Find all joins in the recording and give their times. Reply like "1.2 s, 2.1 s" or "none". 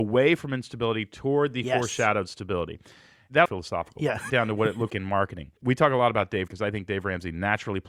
3.4 s, 4.3 s, 4.9 s, 5.6 s, 6.5 s